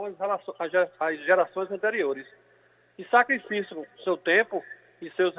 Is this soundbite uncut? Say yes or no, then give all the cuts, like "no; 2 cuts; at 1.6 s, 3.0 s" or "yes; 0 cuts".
yes; 0 cuts